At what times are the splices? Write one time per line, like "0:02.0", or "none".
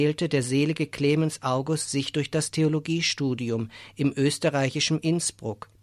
none